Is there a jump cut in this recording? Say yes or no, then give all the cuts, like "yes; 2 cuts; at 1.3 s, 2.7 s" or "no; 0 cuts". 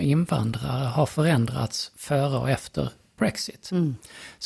no; 0 cuts